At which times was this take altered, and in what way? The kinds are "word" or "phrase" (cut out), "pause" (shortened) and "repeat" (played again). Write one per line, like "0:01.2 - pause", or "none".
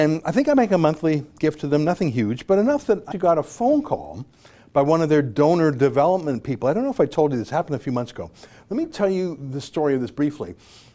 0:03.1 - word